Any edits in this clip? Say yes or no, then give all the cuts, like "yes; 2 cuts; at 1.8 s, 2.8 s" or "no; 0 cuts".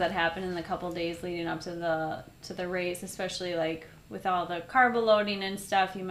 no; 0 cuts